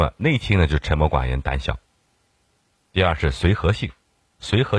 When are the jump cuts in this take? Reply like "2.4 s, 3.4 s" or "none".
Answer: none